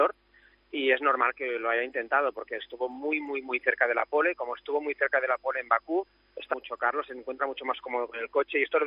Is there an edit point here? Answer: yes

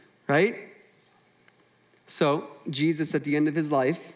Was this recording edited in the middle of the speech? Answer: no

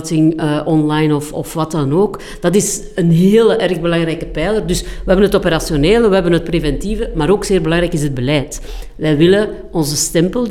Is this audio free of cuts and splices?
yes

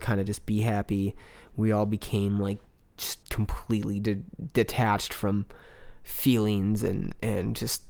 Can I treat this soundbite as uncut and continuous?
no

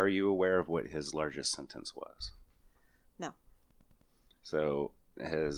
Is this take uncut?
yes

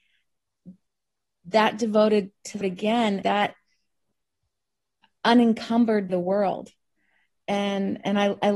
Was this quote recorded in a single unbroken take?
no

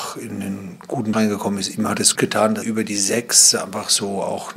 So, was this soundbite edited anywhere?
yes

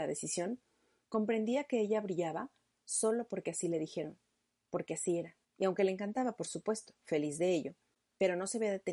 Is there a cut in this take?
yes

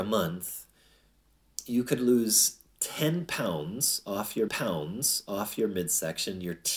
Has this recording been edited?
yes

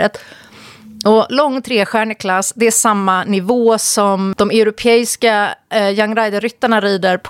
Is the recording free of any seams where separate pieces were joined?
yes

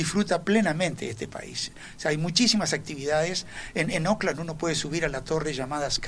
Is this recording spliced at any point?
no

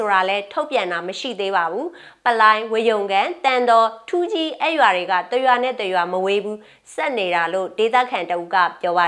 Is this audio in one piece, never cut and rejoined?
yes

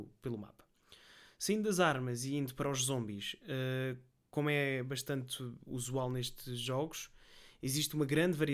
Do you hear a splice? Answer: no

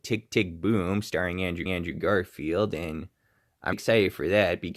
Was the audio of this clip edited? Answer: yes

